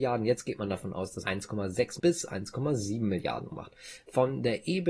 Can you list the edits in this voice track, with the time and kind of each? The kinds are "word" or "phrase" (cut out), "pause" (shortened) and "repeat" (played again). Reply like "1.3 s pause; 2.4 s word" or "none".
1.2 s word; 2.0 s word; 3.5 s word